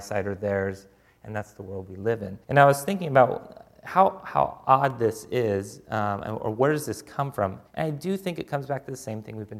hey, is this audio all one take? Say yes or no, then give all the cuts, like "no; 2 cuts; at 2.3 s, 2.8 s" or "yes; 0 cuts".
no; 2 cuts; at 2.4 s, 7.7 s